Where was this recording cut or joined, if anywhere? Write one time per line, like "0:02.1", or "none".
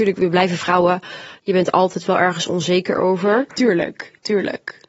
none